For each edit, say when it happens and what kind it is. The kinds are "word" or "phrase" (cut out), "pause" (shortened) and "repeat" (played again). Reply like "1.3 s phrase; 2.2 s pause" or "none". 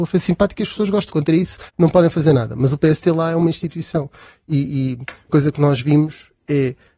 1.1 s phrase; 1.7 s pause; 5.3 s word